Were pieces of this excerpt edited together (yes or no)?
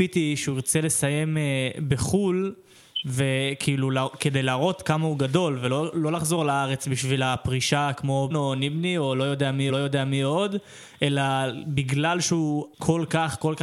yes